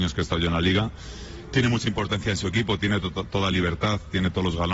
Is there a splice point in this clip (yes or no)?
no